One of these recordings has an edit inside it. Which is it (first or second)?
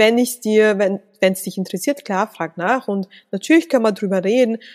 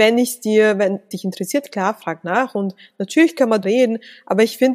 second